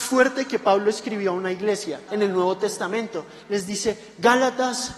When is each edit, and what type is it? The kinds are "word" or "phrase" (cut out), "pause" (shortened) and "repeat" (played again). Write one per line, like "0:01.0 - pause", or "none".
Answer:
0:02.1 - word